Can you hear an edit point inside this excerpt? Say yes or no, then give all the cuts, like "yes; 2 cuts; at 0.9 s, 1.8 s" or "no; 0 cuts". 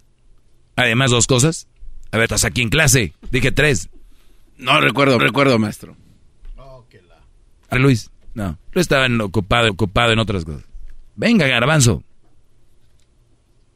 yes; 7 cuts; at 1.1 s, 2.3 s, 5.2 s, 7.7 s, 8.6 s, 9.7 s, 11.1 s